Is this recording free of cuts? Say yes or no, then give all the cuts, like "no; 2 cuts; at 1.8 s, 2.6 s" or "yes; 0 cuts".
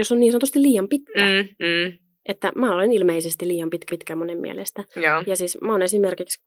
no; 1 cut; at 3.9 s